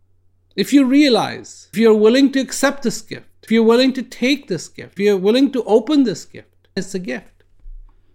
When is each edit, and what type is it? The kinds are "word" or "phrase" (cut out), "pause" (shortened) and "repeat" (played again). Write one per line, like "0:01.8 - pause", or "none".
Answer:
0:01.7 - word
0:03.5 - word
0:05.0 - word
0:06.8 - word